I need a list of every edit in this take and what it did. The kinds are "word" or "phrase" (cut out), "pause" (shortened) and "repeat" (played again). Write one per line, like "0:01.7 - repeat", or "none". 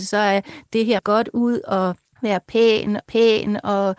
0:01.0 - phrase
0:02.0 - pause
0:03.0 - repeat